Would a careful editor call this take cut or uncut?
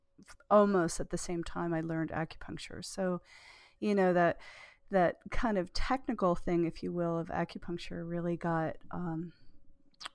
uncut